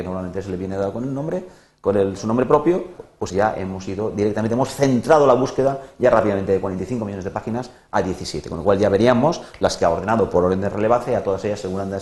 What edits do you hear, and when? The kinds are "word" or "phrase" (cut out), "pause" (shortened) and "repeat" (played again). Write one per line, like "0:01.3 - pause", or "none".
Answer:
0:03.3 - word